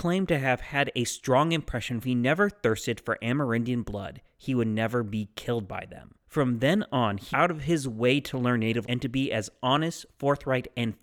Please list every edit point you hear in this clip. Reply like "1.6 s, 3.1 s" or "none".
2.0 s, 6.2 s, 7.3 s, 8.8 s